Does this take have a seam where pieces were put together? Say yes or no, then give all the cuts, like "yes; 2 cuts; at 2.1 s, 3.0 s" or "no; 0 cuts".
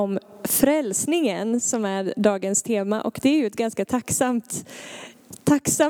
no; 0 cuts